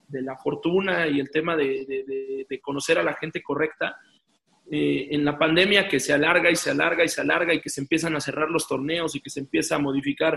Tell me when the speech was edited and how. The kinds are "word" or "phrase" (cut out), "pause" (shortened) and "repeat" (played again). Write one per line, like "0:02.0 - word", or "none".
none